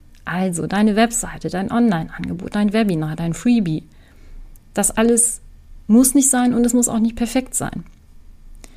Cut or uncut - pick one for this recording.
cut